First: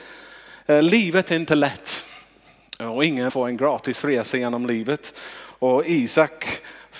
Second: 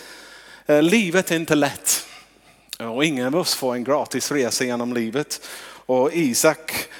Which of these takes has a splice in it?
first; 1 cut; at 3.3 s

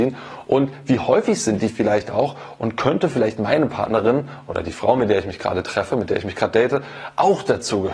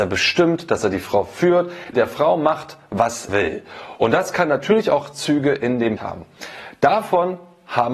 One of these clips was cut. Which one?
second; 3 cuts; at 1.9 s, 3.3 s, 6.0 s

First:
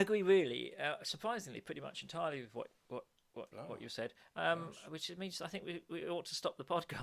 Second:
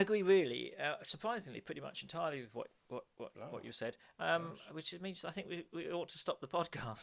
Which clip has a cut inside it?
second; 1 cut; at 3.1 s

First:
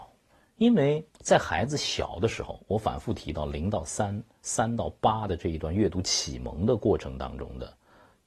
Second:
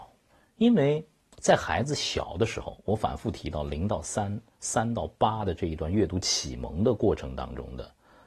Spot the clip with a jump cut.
first; 1 cut; at 1.1 s

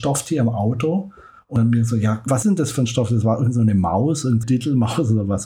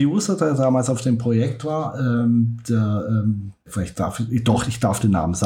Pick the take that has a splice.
first; 2 cuts; at 2.4 s, 4.4 s

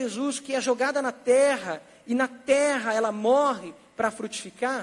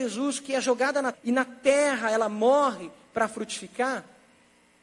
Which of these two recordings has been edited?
second; 1 cut; at 1.1 s

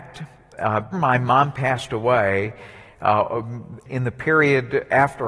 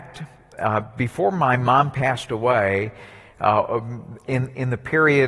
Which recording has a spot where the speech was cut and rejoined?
first; 2 cuts; at 0.9 s, 3.9 s

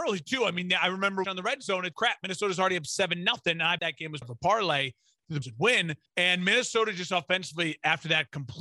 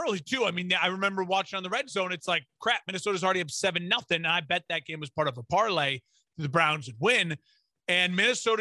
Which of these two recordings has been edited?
first; 6 cuts; at 1.2 s, 1.9 s, 3.8 s, 4.2 s, 5.4 s, 6.1 s

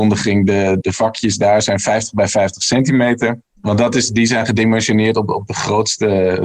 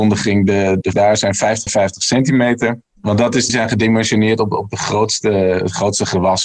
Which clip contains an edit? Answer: second; 3 cuts; at 0.9 s, 1.7 s, 3.5 s

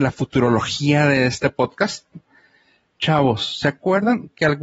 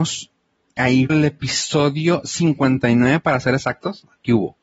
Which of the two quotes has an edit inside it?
second; 1 cut; at 1.1 s

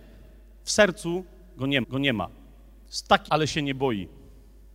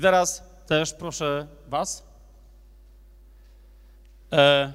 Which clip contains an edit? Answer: first; 2 cuts; at 1.8 s, 3.3 s

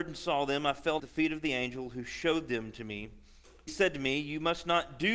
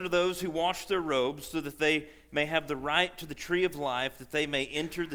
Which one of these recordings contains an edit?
first; 2 cuts; at 1.0 s, 3.7 s

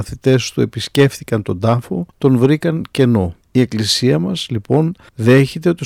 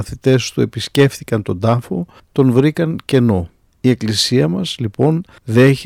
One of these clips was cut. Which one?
first; 2 cuts; at 2.1 s, 3.4 s

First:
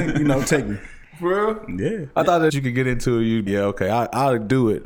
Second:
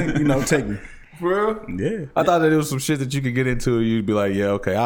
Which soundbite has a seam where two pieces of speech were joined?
first; 2 cuts; at 2.5 s, 3.5 s

